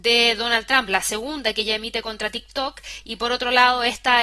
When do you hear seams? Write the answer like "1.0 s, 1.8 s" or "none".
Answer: none